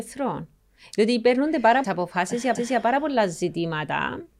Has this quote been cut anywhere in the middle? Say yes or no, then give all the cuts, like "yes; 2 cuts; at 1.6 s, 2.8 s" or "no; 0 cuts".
yes; 2 cuts; at 1.8 s, 2.6 s